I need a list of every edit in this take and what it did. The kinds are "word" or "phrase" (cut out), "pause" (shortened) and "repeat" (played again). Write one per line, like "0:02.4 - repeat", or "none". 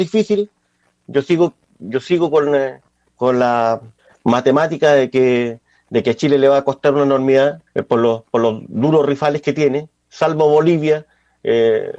0:04.0 - pause
0:07.7 - pause